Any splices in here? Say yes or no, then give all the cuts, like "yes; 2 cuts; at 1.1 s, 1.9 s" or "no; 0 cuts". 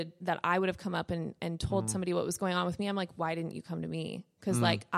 no; 0 cuts